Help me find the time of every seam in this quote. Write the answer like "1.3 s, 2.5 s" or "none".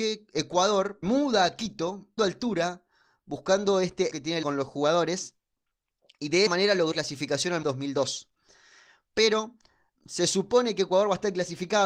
1.0 s, 2.2 s, 4.1 s, 4.4 s, 6.5 s, 6.9 s, 7.6 s, 10.0 s